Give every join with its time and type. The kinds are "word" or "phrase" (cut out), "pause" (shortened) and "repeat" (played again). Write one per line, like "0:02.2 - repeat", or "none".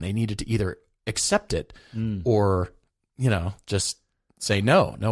none